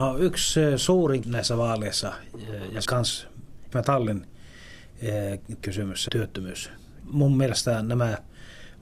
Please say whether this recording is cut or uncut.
cut